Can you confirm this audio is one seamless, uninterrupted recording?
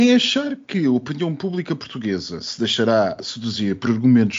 yes; 0 cuts

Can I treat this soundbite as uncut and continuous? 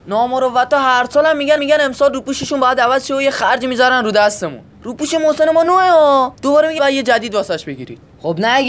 no; 5 cuts; at 1.6 s, 4.7 s, 5.7 s, 6.3 s, 6.8 s

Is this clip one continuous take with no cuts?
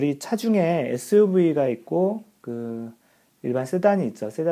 yes; 0 cuts

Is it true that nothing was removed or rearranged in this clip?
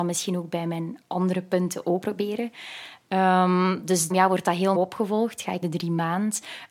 no; 5 cuts; at 1.0 s, 2.0 s, 4.1 s, 4.8 s, 5.6 s

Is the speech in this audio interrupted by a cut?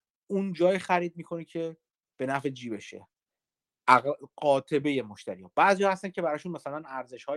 no; 0 cuts

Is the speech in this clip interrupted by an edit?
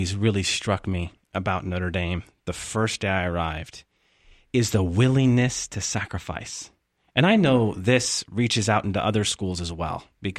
no; 0 cuts

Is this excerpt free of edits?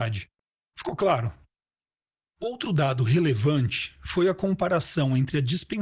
yes; 0 cuts

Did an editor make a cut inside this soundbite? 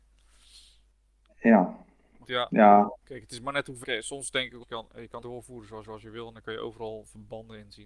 yes; 6 cuts; at 2.2 s, 3.0 s, 3.8 s, 4.6 s, 5.2 s, 5.8 s

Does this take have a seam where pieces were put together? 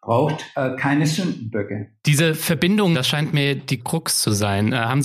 yes; 2 cuts; at 2.9 s, 3.8 s

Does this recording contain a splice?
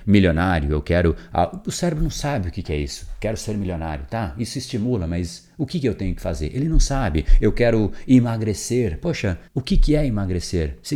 yes; 1 cut; at 9.5 s

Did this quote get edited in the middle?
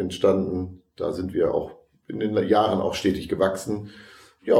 no; 0 cuts

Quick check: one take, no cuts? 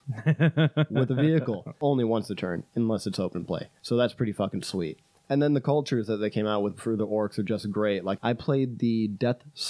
no; 2 cuts; at 3.8 s, 5.0 s

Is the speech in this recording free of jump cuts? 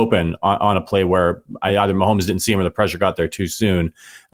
yes; 0 cuts

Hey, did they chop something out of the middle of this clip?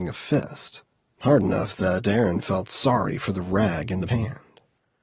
yes; 1 cut; at 4.1 s

